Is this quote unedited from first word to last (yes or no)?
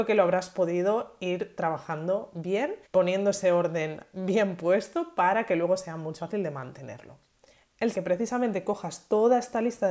no